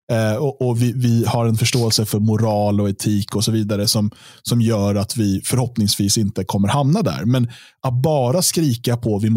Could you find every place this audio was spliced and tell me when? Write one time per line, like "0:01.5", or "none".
none